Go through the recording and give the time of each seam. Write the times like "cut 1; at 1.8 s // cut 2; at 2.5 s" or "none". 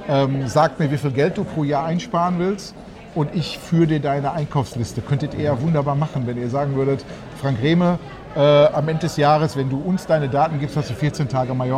none

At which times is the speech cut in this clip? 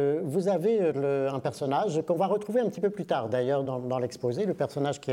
none

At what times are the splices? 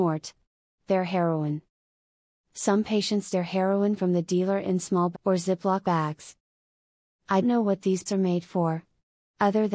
cut 1; at 3.3 s // cut 2; at 4.0 s // cut 3; at 5.1 s // cut 4; at 5.8 s // cut 5; at 7.4 s // cut 6; at 8.1 s

